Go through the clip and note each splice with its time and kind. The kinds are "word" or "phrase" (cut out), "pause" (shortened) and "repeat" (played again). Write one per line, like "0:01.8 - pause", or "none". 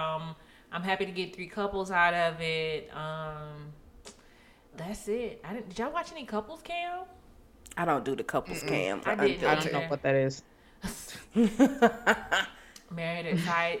0:04.7 - word
0:09.0 - word